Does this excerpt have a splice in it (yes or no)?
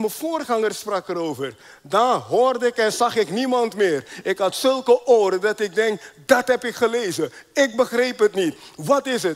no